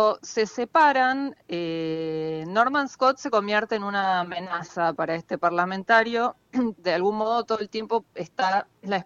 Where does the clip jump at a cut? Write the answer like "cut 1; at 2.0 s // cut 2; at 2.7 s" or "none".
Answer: cut 1; at 6.7 s